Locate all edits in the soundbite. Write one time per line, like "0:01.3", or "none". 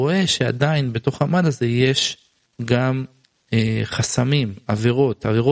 none